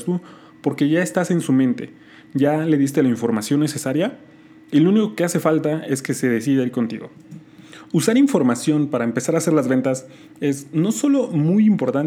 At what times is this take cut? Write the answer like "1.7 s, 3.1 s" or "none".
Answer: none